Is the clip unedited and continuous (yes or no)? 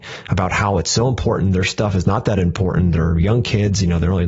yes